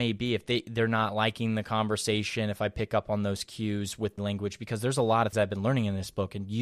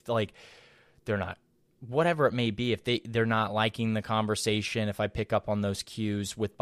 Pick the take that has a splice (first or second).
first